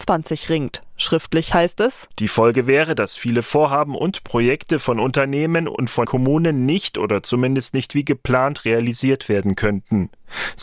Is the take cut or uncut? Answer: cut